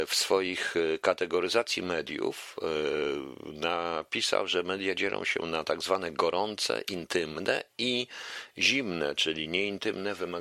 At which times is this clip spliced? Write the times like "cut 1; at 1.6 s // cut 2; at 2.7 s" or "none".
none